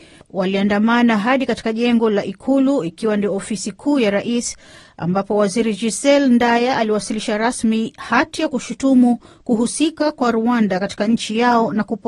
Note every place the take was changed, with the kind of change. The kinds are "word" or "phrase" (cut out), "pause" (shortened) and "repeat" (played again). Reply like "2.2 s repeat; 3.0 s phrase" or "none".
none